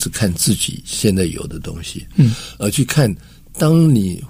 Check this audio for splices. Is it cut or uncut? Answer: uncut